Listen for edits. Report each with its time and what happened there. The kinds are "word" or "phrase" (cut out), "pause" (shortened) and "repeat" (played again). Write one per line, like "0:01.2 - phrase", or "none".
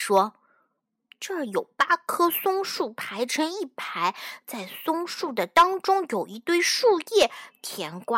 none